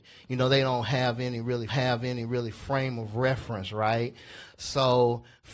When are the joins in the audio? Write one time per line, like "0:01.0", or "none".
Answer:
0:01.7